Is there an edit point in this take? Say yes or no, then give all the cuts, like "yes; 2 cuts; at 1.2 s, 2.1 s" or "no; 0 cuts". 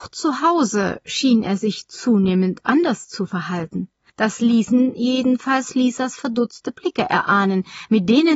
no; 0 cuts